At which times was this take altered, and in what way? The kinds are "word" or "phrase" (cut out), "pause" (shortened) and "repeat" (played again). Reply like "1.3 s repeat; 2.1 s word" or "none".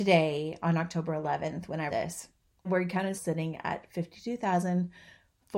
1.9 s word; 2.6 s word; 3.1 s word